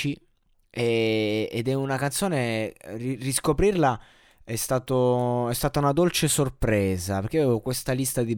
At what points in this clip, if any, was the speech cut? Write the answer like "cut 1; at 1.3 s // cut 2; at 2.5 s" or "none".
none